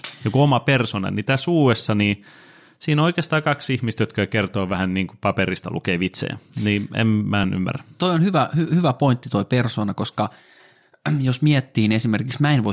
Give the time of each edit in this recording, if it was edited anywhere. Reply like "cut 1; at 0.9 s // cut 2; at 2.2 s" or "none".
none